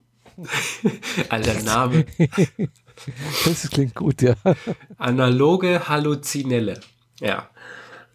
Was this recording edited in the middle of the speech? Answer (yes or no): yes